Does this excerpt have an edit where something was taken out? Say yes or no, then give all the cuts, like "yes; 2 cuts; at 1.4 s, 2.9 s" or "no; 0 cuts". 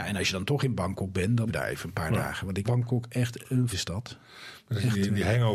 yes; 3 cuts; at 1.5 s, 2.6 s, 3.7 s